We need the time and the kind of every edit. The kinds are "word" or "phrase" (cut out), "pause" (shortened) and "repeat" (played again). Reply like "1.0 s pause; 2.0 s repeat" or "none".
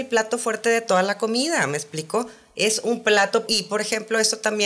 3.5 s word